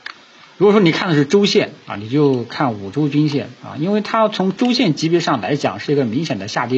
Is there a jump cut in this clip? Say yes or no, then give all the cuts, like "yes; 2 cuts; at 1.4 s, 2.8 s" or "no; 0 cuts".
no; 0 cuts